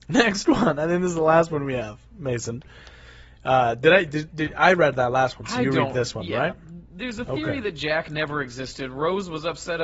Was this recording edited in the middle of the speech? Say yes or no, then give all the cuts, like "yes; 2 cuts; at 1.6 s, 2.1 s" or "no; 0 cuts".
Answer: no; 0 cuts